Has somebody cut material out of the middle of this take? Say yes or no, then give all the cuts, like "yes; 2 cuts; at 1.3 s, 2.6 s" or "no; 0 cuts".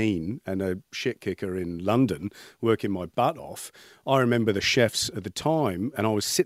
no; 0 cuts